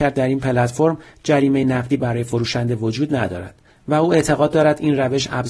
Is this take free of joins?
yes; 0 cuts

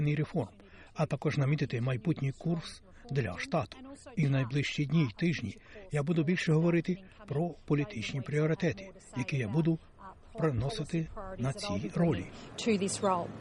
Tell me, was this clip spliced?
no; 0 cuts

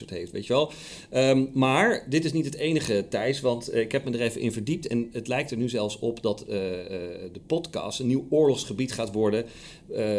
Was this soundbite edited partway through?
no; 0 cuts

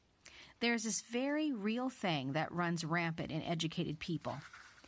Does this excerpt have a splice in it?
no; 0 cuts

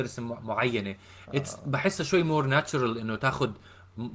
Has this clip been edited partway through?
no; 0 cuts

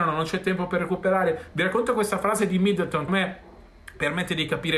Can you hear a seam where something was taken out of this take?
yes; 1 cut; at 3.1 s

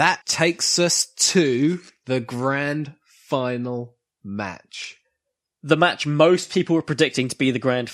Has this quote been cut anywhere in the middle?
no; 0 cuts

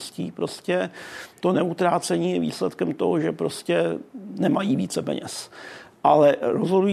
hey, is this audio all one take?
yes; 0 cuts

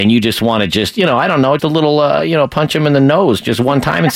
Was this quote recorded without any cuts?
no; 1 cut; at 1.6 s

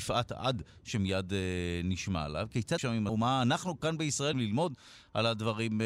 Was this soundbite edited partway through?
yes; 3 cuts; at 2.8 s, 3.1 s, 4.3 s

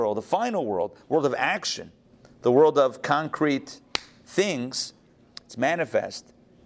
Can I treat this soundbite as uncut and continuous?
yes; 0 cuts

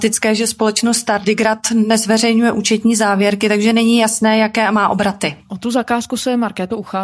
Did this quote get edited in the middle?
no; 0 cuts

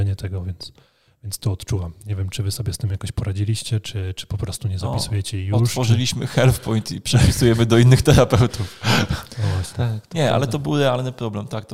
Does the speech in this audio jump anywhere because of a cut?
no; 0 cuts

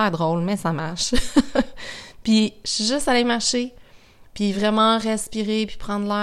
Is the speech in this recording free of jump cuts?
yes; 0 cuts

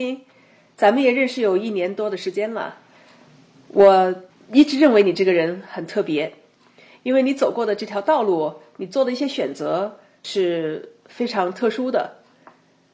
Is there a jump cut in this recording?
no; 0 cuts

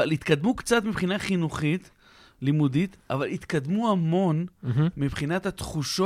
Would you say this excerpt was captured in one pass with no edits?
yes; 0 cuts

